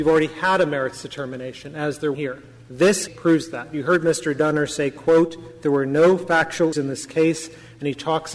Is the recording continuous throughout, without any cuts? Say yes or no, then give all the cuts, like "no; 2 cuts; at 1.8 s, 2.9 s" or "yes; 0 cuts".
no; 3 cuts; at 2.1 s, 3.1 s, 6.7 s